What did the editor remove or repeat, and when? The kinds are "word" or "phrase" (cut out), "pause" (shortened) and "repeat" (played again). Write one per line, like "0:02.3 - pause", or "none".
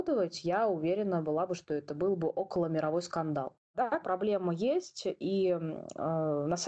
0:04.0 - word